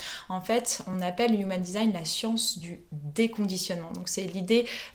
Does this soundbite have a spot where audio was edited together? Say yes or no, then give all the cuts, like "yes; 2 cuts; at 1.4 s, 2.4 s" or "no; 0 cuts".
no; 0 cuts